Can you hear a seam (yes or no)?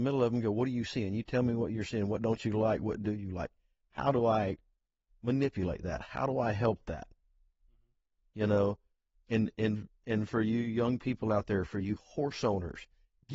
no